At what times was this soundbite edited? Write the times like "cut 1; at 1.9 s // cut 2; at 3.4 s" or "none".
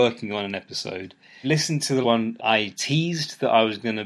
cut 1; at 1.4 s // cut 2; at 2.0 s // cut 3; at 2.4 s